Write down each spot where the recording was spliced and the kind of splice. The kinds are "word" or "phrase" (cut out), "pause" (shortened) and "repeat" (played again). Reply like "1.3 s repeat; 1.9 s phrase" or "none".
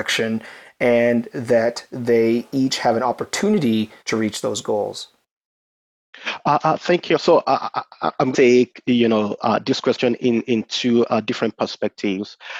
4.0 s pause; 8.3 s phrase